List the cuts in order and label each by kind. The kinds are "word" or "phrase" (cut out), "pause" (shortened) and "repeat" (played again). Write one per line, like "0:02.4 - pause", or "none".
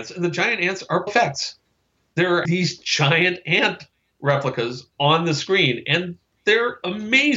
0:01.1 - word
0:02.4 - word
0:04.9 - pause

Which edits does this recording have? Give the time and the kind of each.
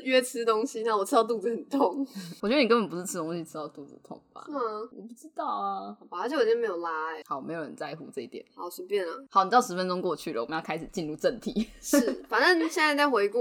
0:07.2 - word

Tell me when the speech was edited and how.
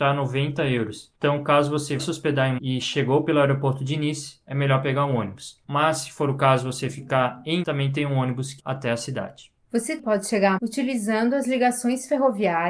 0:02.0 - word
0:02.6 - word
0:07.6 - word
0:08.6 - word
0:10.0 - word
0:10.6 - word

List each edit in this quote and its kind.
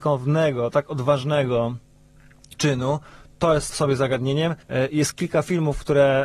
0:02.6 - word
0:03.7 - word
0:04.6 - pause

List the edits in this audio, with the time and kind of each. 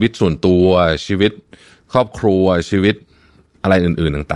none

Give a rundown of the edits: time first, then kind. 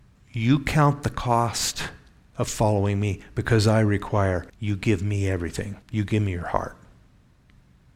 0:04.5 - pause
0:05.8 - pause

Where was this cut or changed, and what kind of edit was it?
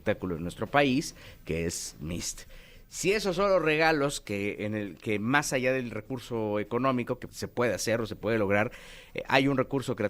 0:07.3 - word

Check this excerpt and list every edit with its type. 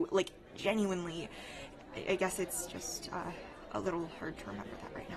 none

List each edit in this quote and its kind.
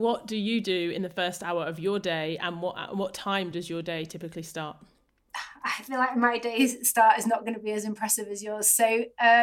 none

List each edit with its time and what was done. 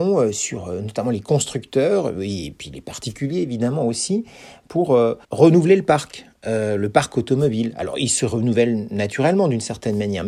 0:05.2 - pause

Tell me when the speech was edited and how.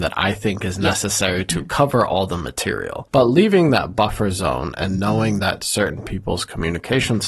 none

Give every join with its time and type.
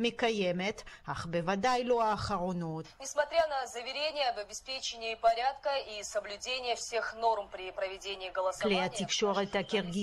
none

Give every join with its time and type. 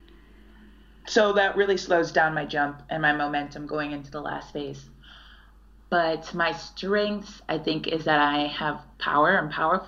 none

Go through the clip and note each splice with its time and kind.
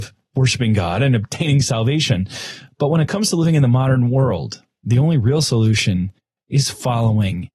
none

